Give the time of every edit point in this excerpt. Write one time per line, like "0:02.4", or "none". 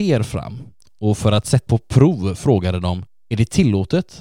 0:01.7